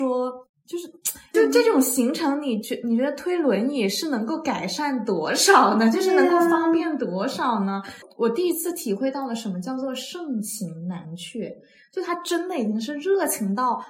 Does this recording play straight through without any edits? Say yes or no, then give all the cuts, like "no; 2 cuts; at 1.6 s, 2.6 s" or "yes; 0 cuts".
yes; 0 cuts